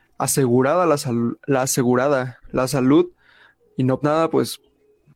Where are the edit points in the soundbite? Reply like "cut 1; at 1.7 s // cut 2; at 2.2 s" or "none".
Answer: cut 1; at 4.0 s